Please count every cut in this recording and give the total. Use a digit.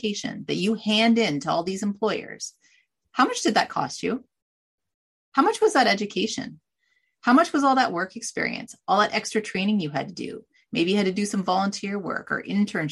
0